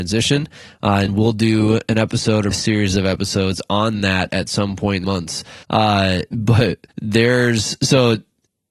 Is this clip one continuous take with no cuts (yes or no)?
no